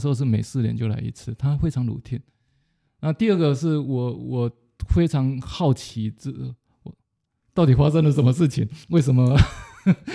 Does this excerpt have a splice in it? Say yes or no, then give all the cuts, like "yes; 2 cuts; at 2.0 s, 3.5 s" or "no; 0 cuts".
yes; 1 cut; at 8.8 s